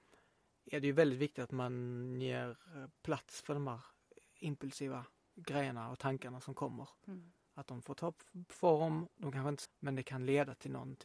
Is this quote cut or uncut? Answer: cut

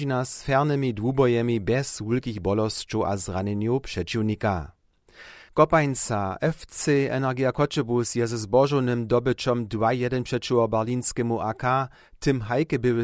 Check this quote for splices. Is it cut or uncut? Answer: uncut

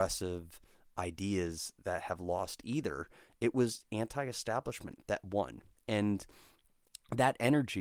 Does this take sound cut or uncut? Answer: cut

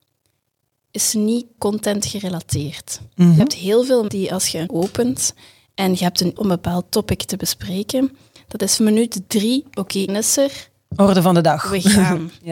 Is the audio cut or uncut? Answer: cut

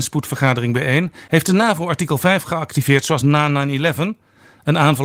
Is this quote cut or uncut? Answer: uncut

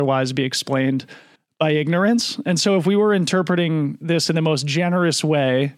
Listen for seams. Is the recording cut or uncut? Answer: cut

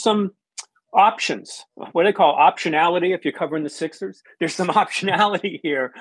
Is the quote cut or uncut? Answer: uncut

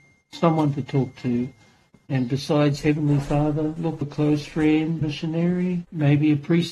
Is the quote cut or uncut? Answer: cut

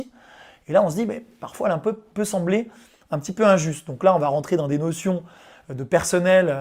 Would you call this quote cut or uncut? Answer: uncut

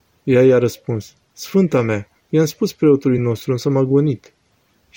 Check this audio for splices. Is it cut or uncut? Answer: uncut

